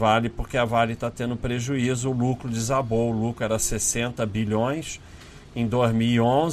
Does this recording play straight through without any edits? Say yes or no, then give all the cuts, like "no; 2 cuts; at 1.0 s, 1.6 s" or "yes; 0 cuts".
yes; 0 cuts